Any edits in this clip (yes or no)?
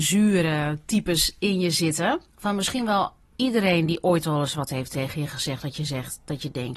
yes